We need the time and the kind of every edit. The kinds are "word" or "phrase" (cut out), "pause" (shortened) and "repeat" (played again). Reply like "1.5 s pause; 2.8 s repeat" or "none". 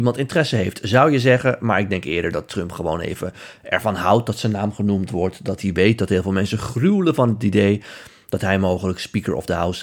none